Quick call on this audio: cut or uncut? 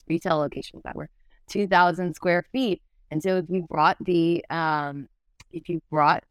uncut